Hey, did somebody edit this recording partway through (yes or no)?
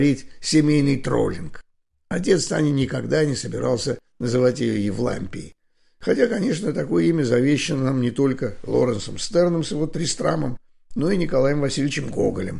no